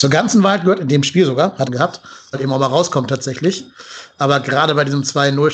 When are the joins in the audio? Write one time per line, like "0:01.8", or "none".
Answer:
0:01.7
0:02.3